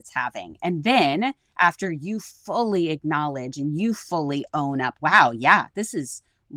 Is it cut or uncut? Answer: cut